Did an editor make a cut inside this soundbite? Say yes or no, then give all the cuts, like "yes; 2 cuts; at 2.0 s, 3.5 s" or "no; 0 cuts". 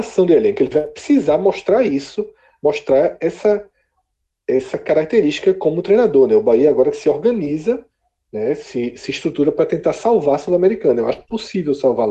no; 0 cuts